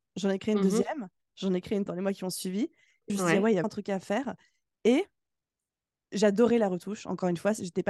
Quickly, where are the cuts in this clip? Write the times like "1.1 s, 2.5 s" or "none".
1.9 s, 3.1 s, 3.6 s